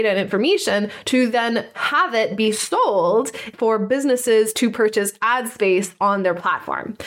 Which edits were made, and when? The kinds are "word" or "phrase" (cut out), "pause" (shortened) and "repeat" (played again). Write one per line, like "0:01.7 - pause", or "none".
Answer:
0:03.5 - phrase

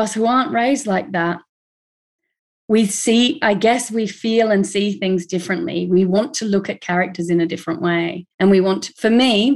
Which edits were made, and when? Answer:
0:08.3 - pause

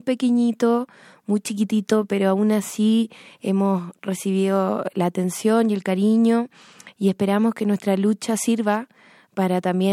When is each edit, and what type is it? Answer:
none

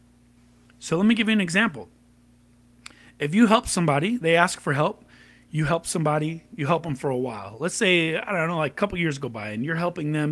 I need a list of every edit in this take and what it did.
none

